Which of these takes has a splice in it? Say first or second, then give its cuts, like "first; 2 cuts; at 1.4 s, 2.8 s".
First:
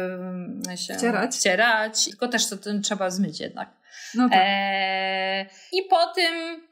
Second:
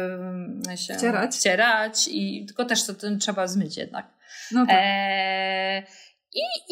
first; 2 cuts; at 2.1 s, 5.7 s